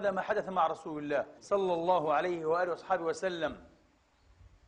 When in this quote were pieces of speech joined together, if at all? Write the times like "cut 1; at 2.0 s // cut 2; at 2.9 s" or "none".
cut 1; at 1.4 s